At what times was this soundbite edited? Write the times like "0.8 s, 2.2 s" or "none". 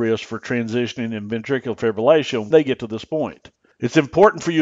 2.5 s